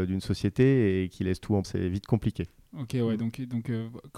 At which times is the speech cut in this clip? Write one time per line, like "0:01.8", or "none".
0:01.6
0:02.6